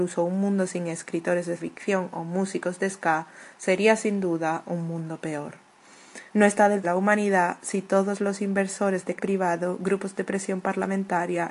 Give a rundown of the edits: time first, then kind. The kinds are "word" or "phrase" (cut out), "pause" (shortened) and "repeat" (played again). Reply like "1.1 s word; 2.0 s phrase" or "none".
1.6 s word; 6.3 s pause; 6.8 s phrase; 9.2 s word